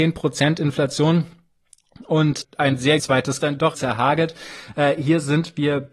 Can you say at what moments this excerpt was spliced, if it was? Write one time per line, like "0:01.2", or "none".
0:02.4
0:03.0
0:03.4
0:03.7